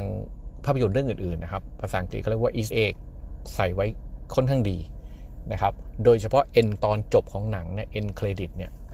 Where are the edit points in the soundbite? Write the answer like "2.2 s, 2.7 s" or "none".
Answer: 2.7 s, 6.8 s